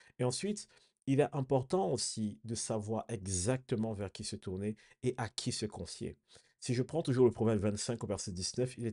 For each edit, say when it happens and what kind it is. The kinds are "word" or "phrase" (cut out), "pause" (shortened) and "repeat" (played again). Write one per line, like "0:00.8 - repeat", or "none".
none

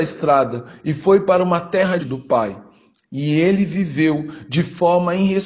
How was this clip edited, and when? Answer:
0:02.0 - word

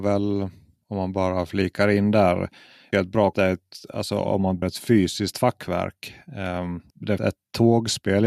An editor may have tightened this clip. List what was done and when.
0:02.9 - word
0:03.3 - word
0:04.6 - word
0:07.2 - word

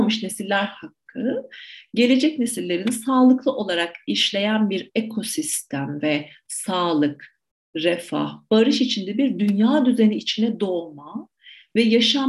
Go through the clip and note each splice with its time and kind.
none

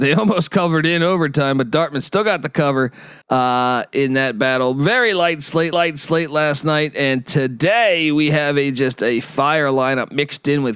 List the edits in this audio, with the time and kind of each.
0:03.2 - pause
0:05.7 - repeat

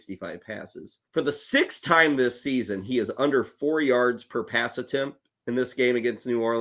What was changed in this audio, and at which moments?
0:01.0 - pause
0:05.4 - pause

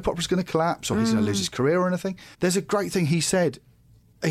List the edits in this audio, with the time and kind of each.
0:02.3 - pause

